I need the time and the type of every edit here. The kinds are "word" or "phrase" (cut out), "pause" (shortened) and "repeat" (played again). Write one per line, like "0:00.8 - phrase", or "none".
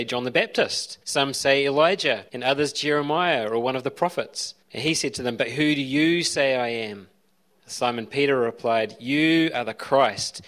0:01.0 - pause
0:02.3 - pause
0:04.6 - pause
0:07.3 - pause